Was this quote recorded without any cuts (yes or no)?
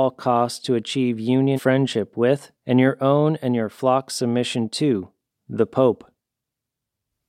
no